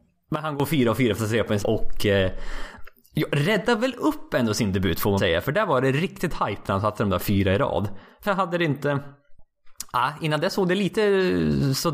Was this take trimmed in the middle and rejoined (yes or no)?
yes